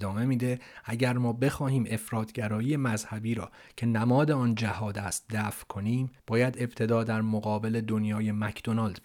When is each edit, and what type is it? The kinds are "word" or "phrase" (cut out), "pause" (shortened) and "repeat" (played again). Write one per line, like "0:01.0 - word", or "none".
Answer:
0:06.2 - pause